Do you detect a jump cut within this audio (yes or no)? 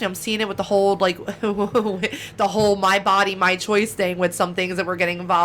no